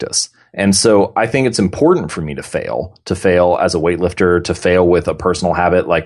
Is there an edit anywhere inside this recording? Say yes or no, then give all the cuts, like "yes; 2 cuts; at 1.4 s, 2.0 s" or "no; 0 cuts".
no; 0 cuts